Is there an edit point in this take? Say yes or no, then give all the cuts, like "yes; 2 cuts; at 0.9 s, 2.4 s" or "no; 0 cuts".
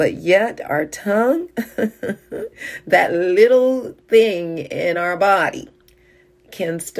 no; 0 cuts